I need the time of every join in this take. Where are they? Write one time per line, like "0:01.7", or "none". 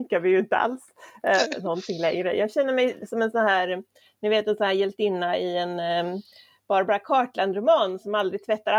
none

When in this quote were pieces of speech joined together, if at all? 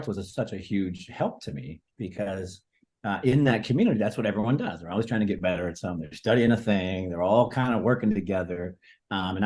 0:01.9

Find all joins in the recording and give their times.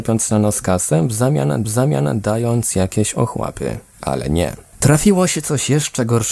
0:01.6

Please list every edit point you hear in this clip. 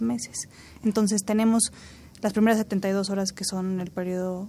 none

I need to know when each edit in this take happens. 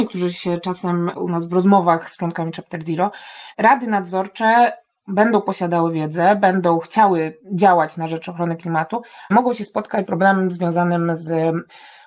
0:01.2
0:02.5
0:03.5
0:09.3
0:10.1

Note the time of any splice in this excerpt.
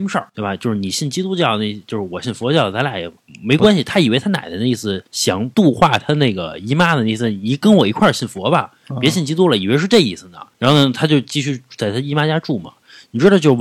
0:05.1

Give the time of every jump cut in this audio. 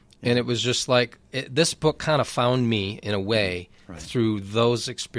0:01.3

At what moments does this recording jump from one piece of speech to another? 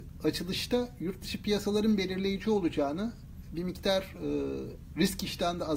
none

